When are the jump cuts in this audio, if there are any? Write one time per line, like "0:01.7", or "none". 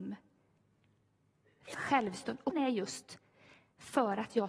0:01.7
0:02.5

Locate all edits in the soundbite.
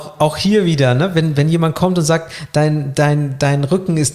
none

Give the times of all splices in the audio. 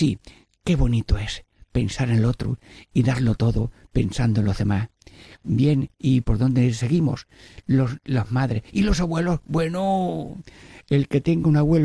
none

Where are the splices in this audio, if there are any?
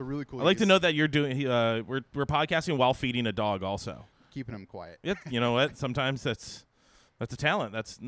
0:04.1

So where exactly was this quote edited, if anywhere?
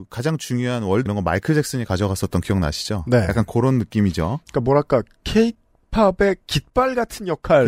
0:01.1
0:06.4

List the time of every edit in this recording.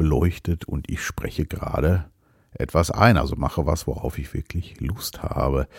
none

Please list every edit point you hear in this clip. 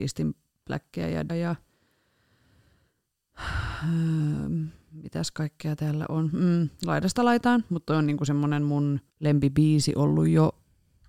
0:01.3
0:09.1

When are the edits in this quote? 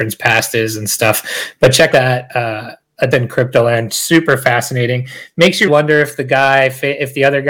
0:01.9
0:03.1
0:05.7

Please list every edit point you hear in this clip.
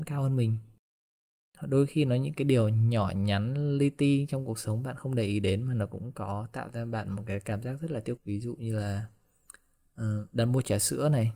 0:08.2

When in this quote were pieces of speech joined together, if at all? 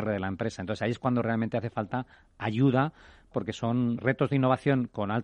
0:03.3
0:04.0

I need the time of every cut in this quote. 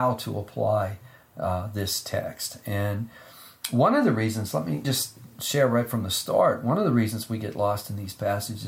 0:04.8

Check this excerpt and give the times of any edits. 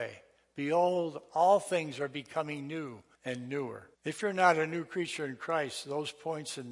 0:03.1
0:03.9

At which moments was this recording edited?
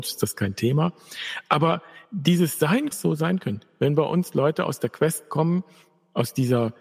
0:02.1
0:02.9

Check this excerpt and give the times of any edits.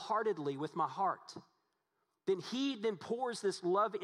none

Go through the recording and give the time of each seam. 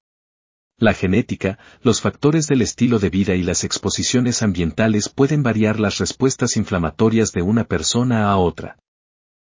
none

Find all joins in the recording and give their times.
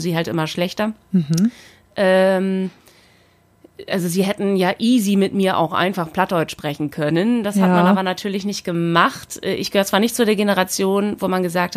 0:01.0

